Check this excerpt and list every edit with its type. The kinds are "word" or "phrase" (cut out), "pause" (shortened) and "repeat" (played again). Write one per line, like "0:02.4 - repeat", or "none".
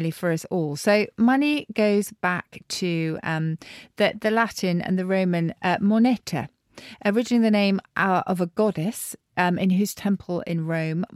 none